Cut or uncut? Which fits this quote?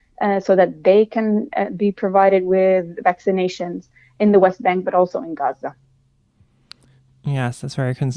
uncut